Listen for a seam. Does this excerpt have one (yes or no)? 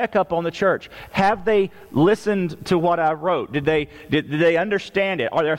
no